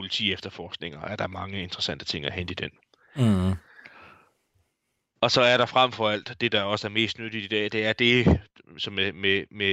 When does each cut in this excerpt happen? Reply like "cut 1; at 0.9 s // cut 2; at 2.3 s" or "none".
none